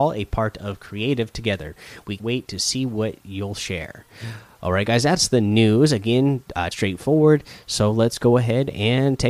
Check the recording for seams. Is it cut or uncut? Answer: cut